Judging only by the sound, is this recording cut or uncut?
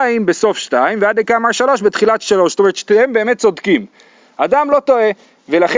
uncut